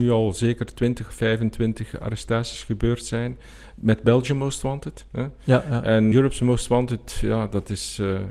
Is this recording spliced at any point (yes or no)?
yes